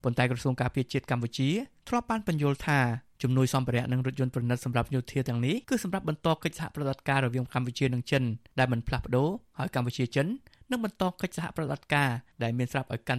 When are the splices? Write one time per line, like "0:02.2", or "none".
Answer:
0:05.6